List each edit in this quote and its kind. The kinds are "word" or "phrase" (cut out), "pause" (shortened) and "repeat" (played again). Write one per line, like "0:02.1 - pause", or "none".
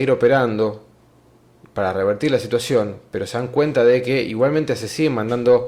none